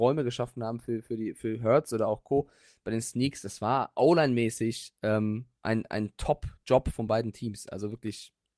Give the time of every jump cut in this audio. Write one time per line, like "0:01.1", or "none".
none

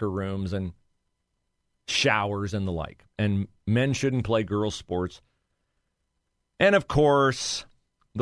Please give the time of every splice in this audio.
none

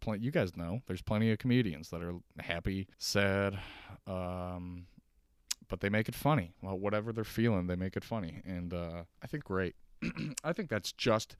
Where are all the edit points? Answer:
0:02.9
0:09.1
0:09.4

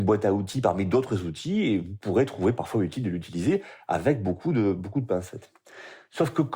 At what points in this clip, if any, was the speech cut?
none

